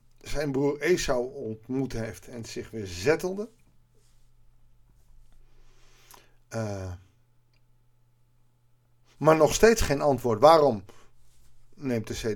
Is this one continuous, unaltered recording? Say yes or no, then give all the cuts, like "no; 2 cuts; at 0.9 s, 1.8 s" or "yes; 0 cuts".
yes; 0 cuts